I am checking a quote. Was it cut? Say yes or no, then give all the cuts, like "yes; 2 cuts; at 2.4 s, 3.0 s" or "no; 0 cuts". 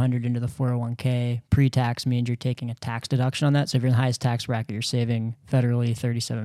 no; 0 cuts